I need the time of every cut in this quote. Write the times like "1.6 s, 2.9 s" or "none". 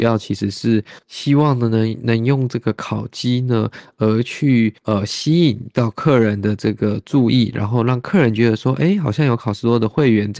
1.0 s, 4.8 s